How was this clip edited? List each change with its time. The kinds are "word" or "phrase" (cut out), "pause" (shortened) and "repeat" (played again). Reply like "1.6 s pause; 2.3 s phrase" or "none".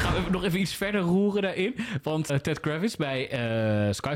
2.3 s word